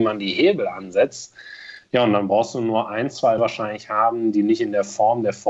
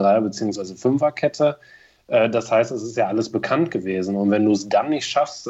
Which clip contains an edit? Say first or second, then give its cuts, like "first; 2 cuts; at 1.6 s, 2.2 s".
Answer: first; 1 cut; at 3.4 s